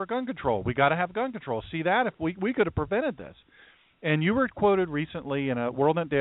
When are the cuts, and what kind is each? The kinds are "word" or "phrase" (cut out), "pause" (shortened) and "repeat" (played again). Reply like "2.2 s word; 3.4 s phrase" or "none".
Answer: none